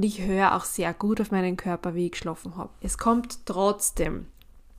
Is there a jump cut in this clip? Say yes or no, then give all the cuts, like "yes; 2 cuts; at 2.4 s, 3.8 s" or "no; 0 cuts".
no; 0 cuts